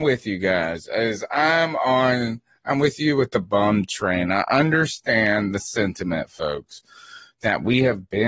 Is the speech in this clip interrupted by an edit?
no; 0 cuts

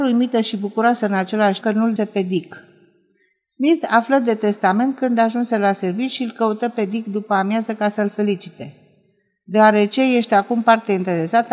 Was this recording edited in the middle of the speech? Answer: yes; 2 cuts; at 1.6 s, 2.0 s

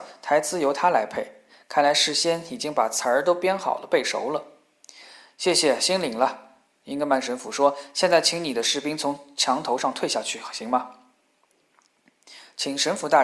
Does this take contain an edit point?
no; 0 cuts

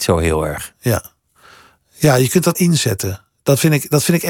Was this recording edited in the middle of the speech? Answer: yes; 1 cut; at 2.5 s

